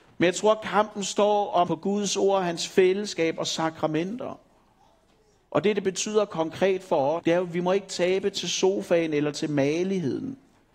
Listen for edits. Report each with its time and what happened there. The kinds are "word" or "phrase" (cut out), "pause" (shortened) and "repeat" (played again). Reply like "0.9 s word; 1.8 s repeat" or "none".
1.7 s word; 7.2 s word